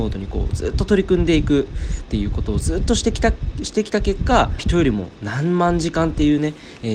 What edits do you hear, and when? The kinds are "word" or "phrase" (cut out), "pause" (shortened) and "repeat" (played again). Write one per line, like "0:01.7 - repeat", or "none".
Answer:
0:04.6 - phrase